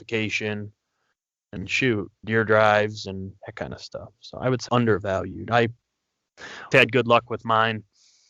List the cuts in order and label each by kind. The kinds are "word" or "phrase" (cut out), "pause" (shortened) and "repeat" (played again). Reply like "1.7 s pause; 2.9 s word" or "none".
1.6 s phrase; 2.2 s phrase; 3.4 s pause; 4.7 s word; 6.7 s word